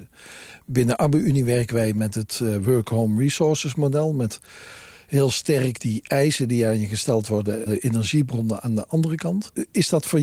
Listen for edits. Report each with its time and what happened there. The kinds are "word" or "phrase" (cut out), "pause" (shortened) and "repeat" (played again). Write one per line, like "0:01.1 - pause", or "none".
0:05.8 - word
0:07.7 - word